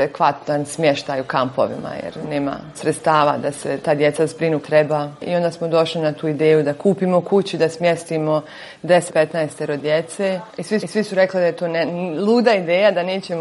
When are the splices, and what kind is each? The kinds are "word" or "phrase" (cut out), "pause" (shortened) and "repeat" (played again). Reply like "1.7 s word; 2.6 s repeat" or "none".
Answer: 2.2 s word; 2.7 s word; 4.6 s word; 9.1 s word; 10.5 s pause; 10.8 s repeat